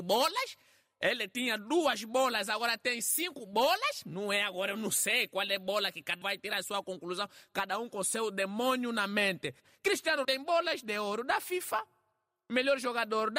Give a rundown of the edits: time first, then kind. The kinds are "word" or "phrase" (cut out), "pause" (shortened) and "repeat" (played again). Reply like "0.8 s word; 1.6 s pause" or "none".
6.2 s word; 10.2 s word